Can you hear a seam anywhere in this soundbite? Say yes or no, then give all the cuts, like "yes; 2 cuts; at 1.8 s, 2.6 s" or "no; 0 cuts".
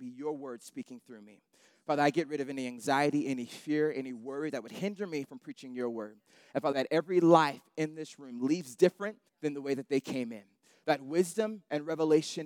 yes; 2 cuts; at 6.7 s, 9.3 s